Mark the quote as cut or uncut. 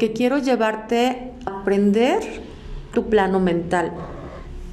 cut